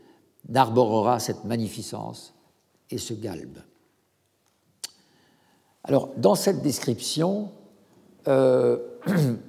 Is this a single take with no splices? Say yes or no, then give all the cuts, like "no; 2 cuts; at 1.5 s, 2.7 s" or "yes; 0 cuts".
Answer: yes; 0 cuts